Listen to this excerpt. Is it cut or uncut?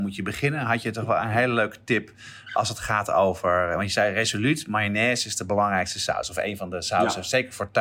uncut